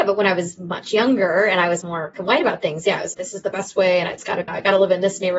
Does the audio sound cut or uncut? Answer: cut